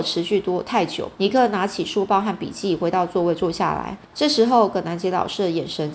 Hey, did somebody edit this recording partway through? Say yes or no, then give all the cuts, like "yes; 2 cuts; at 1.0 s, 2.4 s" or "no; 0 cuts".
yes; 2 cuts; at 1.1 s, 4.0 s